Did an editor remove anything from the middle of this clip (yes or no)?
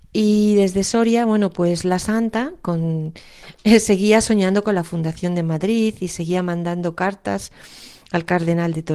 no